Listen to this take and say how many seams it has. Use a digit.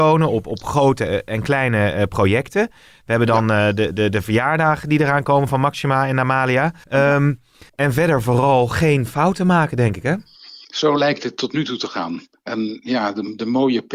4